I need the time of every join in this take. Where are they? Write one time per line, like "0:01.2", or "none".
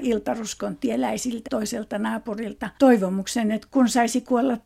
0:01.4
0:02.7